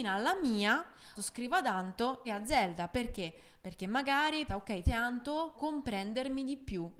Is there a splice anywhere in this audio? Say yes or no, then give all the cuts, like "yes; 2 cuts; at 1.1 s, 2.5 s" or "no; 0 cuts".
yes; 5 cuts; at 1.2 s, 2.2 s, 4.5 s, 4.8 s, 5.5 s